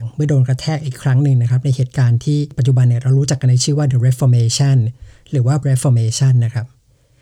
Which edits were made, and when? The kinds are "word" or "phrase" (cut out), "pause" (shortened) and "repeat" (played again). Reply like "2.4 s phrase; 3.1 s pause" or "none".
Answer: 5.6 s word